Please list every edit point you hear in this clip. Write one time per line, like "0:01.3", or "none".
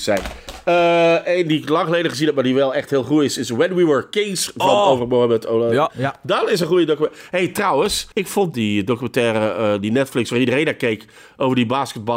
0:08.1
0:08.5